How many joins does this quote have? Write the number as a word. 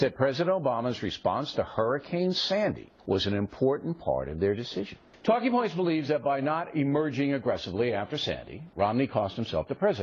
one